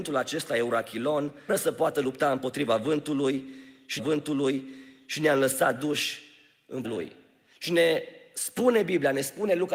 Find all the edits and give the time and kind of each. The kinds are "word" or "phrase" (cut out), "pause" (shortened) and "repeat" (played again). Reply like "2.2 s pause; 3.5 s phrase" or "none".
1.5 s word; 4.0 s repeat; 6.8 s word